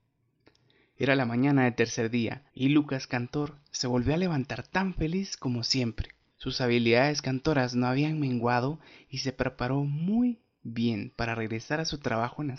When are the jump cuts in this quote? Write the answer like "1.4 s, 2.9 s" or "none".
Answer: 2.5 s, 6.3 s